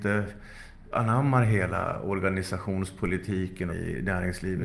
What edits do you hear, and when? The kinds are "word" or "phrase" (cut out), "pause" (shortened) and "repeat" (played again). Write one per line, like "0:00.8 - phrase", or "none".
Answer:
0:00.9 - word
0:03.7 - phrase